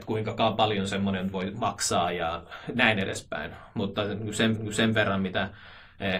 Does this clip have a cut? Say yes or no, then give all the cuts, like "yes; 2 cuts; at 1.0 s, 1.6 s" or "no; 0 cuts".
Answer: yes; 1 cut; at 4.5 s